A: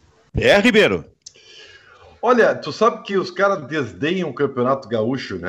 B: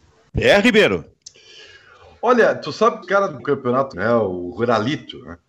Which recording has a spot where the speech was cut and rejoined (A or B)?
B